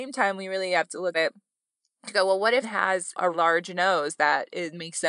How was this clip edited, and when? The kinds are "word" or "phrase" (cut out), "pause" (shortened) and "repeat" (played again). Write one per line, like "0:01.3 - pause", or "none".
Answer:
0:01.1 - word
0:02.6 - word
0:03.3 - word

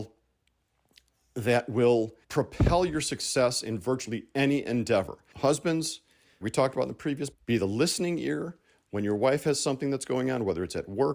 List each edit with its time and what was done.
0:02.2 - pause
0:06.4 - word
0:07.3 - word

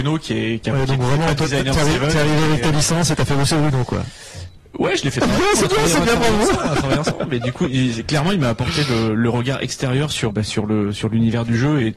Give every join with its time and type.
0:10.3 - word

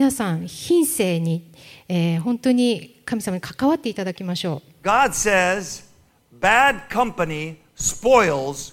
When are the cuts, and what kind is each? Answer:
none

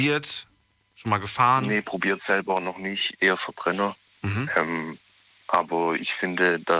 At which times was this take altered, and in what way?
none

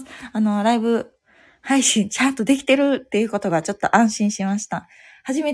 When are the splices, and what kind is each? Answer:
none

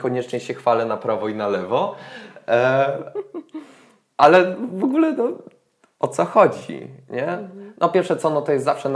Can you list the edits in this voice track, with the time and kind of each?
none

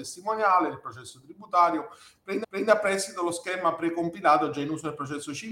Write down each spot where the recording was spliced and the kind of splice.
0:02.4 - repeat

